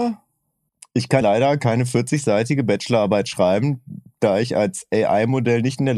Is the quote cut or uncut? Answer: cut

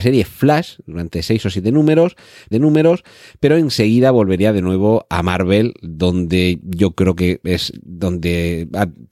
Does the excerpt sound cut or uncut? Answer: cut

